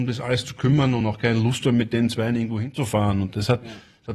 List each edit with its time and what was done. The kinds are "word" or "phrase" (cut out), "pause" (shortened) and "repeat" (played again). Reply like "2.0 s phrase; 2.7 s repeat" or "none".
none